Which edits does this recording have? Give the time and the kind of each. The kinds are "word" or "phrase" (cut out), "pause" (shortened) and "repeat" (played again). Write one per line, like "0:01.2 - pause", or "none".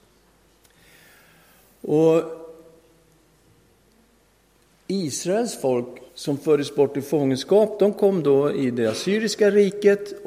0:06.1 - pause